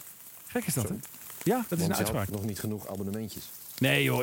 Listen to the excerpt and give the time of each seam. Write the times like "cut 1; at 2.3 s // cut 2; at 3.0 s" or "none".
cut 1; at 1.7 s // cut 2; at 2.3 s